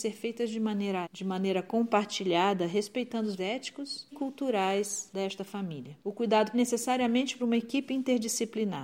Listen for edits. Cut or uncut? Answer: cut